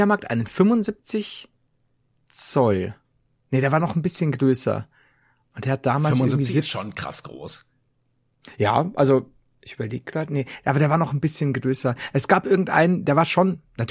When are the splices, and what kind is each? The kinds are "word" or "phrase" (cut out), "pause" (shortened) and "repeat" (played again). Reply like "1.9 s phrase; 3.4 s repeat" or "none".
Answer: none